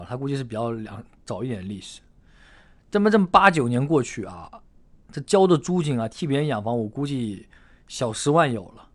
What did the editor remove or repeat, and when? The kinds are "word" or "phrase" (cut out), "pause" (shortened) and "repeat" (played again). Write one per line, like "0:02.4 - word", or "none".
none